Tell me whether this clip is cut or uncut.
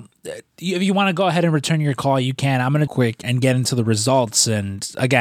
cut